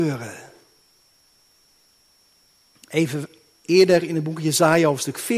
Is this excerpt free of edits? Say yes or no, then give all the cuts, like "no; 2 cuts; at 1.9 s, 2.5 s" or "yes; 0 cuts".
yes; 0 cuts